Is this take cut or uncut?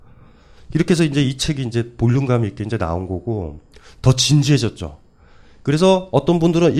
uncut